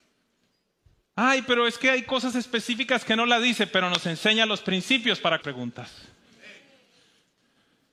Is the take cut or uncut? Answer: cut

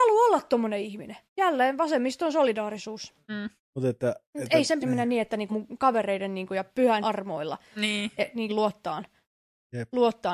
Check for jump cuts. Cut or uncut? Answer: cut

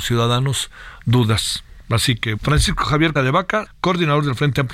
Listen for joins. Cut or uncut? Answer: cut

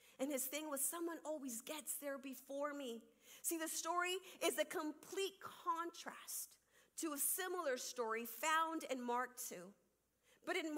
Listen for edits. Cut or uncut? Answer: uncut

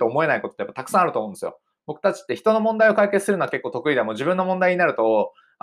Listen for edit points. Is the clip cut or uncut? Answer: uncut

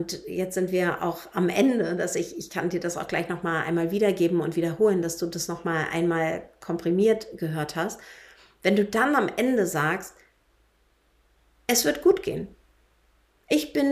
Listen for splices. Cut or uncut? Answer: uncut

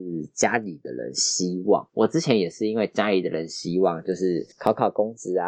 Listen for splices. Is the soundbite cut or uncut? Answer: cut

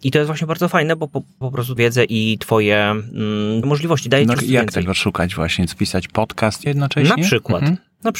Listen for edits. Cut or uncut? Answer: cut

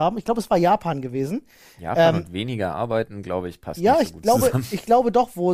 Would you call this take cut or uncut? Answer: uncut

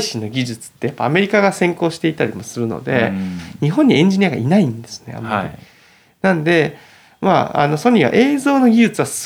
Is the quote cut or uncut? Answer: uncut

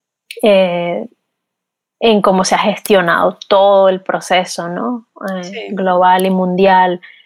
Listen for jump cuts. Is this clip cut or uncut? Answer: uncut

